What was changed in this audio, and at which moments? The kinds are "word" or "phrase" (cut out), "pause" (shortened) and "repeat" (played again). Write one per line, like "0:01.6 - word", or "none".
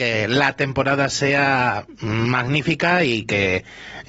none